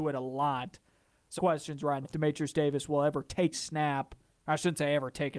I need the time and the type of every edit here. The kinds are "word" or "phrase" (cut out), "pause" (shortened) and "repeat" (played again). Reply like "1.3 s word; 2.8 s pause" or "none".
1.4 s phrase; 2.0 s word; 3.5 s word